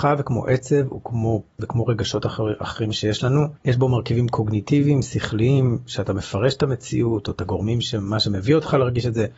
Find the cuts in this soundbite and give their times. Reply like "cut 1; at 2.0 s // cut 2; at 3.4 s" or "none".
cut 1; at 1.6 s // cut 2; at 3.6 s